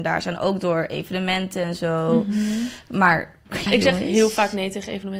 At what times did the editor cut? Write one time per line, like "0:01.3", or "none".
0:03.7